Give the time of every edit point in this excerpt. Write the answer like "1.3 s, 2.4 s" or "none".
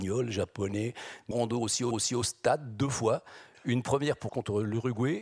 1.3 s, 1.9 s, 4.3 s